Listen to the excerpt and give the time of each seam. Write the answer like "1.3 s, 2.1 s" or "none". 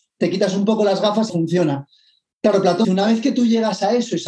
1.3 s, 2.8 s